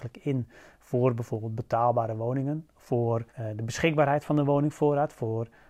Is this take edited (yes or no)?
yes